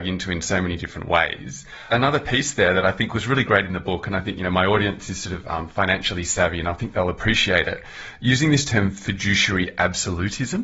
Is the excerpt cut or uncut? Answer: uncut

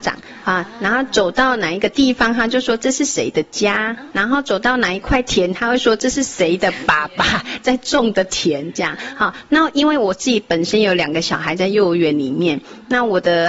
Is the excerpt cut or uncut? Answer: cut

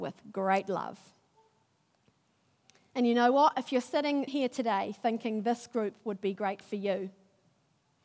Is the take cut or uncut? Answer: cut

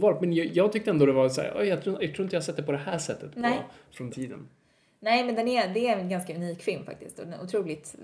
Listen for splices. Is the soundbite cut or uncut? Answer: cut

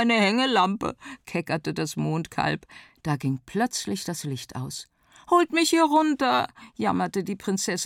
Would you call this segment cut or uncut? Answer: uncut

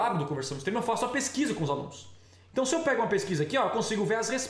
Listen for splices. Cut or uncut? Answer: uncut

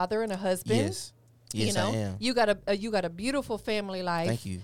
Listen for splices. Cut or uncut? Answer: uncut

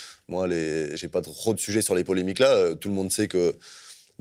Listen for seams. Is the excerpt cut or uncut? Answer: uncut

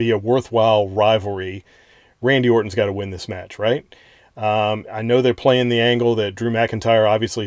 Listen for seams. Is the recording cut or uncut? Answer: uncut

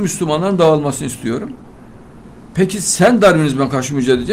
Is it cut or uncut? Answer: uncut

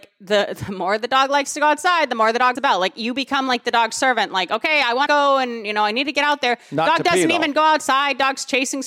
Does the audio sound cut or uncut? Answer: cut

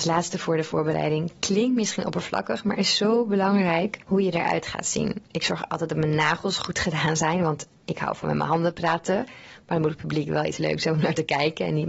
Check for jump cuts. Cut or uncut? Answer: cut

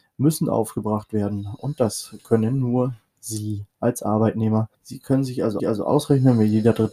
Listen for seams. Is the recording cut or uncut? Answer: cut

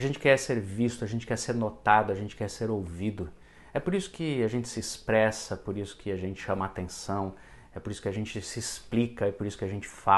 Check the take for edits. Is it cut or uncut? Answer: uncut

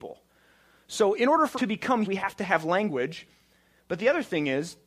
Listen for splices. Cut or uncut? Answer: cut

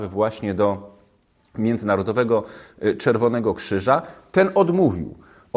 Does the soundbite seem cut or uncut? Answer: uncut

